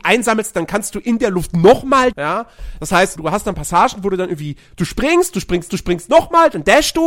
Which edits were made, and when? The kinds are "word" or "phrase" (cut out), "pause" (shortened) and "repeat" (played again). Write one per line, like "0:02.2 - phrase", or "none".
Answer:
0:02.1 - word
0:03.2 - word
0:05.7 - repeat